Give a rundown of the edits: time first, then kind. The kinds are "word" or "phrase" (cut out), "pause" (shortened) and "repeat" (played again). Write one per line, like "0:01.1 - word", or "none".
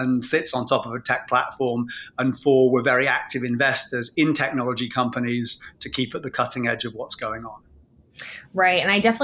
none